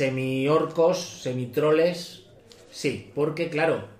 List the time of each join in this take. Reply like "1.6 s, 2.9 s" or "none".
none